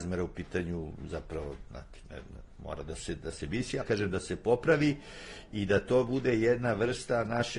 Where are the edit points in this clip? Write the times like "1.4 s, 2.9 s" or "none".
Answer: 3.3 s, 3.8 s

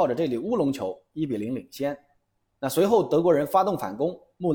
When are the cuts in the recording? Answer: none

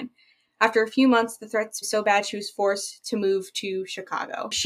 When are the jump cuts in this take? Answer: 1.8 s

